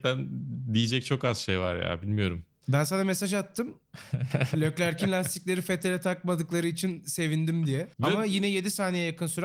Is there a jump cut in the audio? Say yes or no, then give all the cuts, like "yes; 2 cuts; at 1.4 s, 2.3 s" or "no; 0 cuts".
yes; 1 cut; at 7.9 s